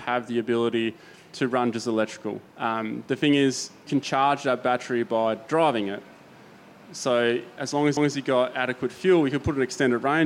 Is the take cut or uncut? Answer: cut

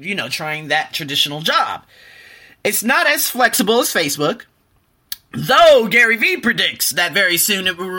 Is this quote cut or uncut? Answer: uncut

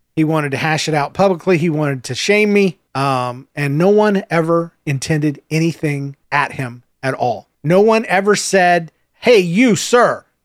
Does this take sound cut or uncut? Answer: cut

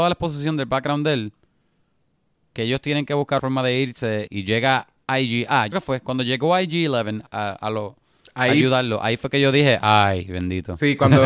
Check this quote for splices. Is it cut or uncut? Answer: cut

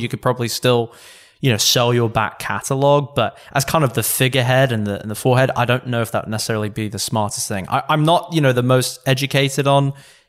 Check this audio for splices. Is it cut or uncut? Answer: uncut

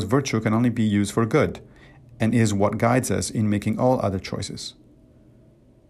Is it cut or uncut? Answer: uncut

